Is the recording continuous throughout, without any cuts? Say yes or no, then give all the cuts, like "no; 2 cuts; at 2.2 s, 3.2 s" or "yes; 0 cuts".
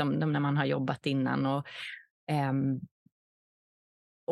yes; 0 cuts